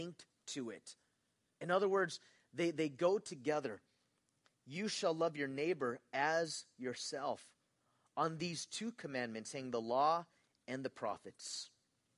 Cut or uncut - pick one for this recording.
uncut